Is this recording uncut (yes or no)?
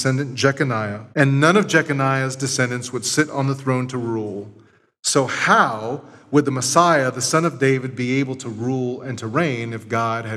no